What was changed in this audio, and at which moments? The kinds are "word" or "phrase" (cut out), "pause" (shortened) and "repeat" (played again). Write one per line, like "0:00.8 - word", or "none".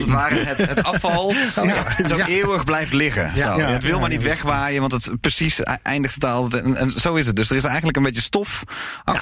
none